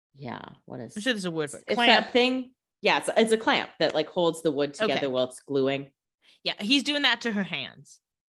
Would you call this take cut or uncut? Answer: uncut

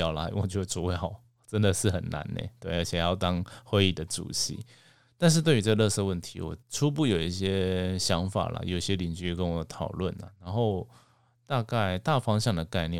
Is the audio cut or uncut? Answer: cut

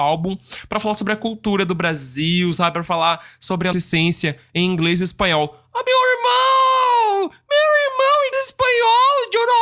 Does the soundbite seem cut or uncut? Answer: cut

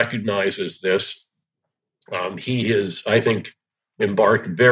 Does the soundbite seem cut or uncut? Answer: uncut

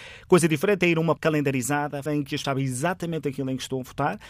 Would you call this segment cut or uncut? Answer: cut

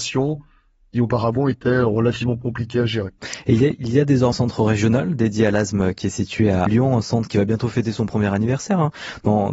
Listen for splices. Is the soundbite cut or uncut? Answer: cut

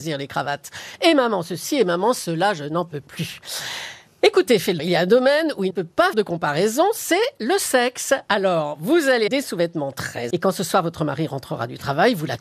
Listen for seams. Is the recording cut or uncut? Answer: cut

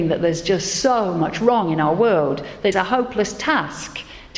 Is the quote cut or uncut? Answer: cut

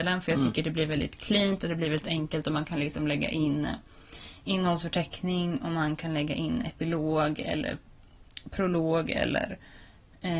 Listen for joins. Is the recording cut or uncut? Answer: uncut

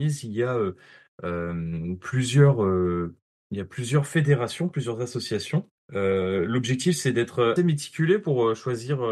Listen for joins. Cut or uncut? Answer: cut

